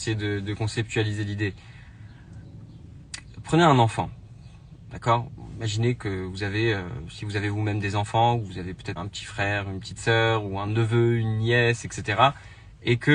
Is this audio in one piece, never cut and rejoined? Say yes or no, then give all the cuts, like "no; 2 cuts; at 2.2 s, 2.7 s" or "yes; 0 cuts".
no; 1 cut; at 9.0 s